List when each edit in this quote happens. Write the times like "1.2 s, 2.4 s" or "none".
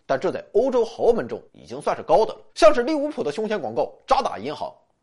1.5 s, 2.5 s